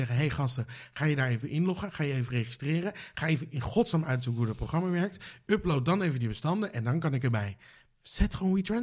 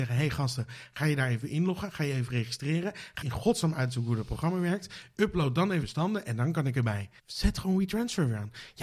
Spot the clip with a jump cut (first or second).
second